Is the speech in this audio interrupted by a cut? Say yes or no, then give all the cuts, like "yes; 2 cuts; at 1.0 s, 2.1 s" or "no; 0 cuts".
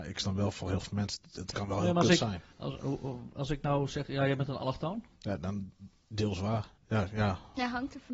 yes; 2 cuts; at 2.5 s, 5.1 s